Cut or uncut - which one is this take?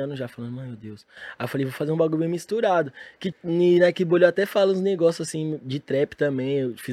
cut